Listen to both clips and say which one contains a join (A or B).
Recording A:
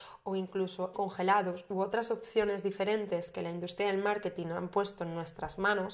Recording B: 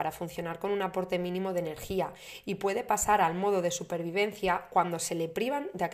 A